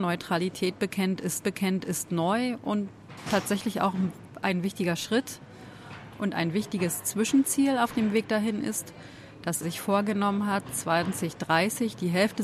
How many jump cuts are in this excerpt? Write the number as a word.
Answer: two